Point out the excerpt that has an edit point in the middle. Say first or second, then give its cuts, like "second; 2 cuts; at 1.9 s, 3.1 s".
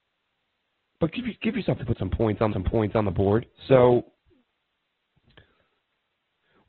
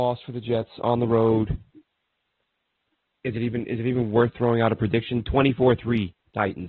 first; 3 cuts; at 1.8 s, 2.5 s, 3.6 s